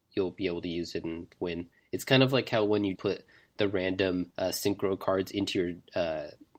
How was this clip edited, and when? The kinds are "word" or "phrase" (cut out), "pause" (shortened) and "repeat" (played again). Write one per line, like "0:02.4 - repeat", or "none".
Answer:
0:01.7 - pause
0:03.0 - word
0:04.3 - pause